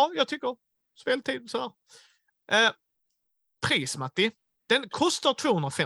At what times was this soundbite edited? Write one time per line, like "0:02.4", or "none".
none